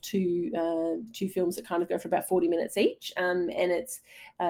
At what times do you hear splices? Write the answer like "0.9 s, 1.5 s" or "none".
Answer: none